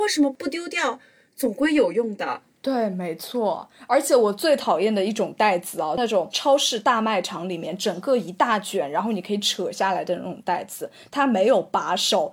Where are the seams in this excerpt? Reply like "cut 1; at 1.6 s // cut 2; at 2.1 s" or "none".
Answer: none